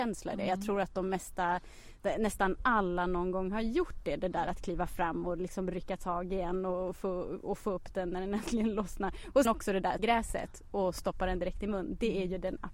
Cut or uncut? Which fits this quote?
cut